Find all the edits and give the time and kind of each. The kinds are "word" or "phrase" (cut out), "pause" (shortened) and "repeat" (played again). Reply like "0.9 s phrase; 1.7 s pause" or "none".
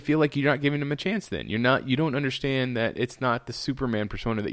none